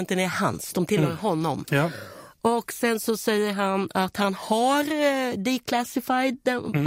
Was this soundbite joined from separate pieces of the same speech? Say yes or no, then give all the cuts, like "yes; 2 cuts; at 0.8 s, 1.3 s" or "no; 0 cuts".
no; 0 cuts